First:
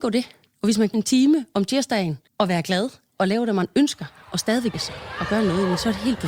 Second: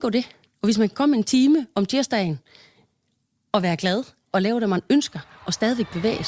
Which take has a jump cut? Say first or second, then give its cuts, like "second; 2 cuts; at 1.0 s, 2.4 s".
first; 3 cuts; at 0.9 s, 2.3 s, 4.7 s